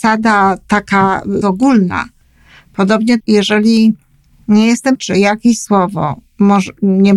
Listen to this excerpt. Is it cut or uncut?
cut